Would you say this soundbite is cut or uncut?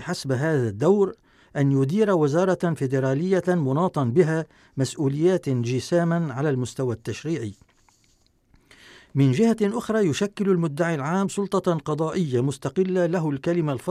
uncut